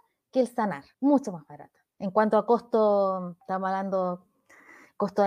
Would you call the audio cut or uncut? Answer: cut